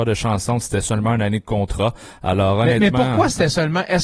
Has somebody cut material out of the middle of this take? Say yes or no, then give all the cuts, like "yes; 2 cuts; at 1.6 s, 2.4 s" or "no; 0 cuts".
no; 0 cuts